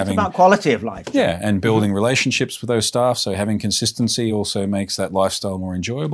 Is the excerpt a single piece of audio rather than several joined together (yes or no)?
yes